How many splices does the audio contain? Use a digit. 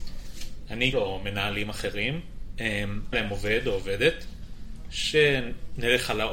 2